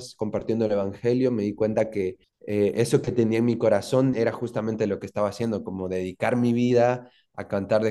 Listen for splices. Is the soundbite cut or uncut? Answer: cut